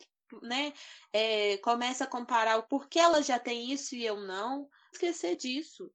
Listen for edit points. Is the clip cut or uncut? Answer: cut